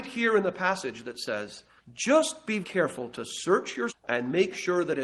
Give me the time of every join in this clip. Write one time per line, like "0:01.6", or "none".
0:01.8
0:02.6
0:03.9